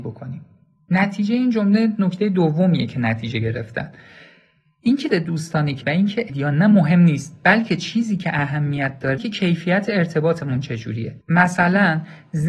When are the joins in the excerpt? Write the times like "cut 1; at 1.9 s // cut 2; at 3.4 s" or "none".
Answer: cut 1; at 5.1 s // cut 2; at 5.8 s // cut 3; at 6.3 s // cut 4; at 9.2 s // cut 5; at 11.2 s